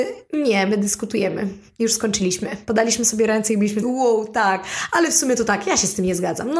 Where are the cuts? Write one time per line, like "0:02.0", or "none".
0:03.8